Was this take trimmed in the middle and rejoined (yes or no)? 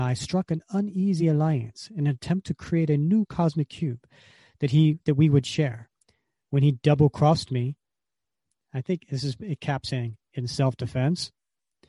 no